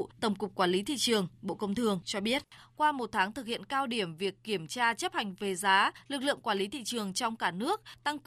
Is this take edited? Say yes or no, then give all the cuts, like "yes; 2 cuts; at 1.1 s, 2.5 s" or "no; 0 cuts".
no; 0 cuts